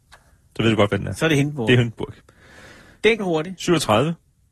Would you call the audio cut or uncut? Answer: cut